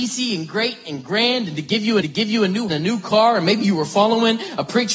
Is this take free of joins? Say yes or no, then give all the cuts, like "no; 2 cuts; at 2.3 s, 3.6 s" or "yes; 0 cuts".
no; 2 cuts; at 2.0 s, 2.7 s